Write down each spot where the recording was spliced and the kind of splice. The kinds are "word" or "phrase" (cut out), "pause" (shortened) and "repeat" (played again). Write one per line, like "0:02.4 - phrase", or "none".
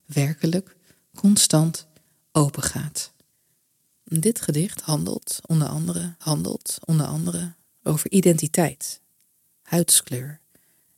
0:03.3 - pause
0:06.2 - repeat